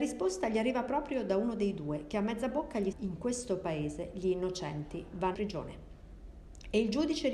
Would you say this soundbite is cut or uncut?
cut